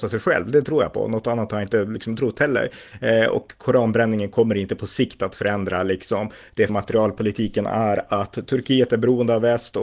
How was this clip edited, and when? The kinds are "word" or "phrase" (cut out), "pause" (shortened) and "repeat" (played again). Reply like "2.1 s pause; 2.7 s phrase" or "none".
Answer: 6.7 s word